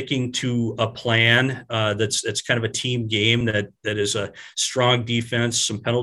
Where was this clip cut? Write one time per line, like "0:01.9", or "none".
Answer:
none